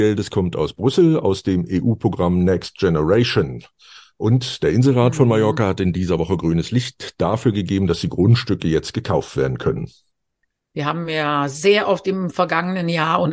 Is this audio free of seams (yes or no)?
yes